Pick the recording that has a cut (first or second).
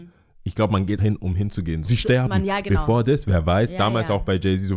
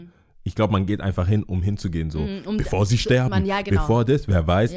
first